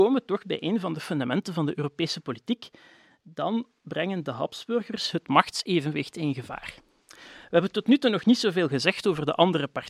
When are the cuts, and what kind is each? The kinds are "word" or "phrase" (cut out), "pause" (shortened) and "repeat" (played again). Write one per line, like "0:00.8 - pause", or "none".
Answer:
none